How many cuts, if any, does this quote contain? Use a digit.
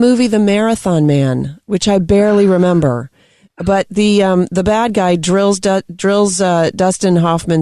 0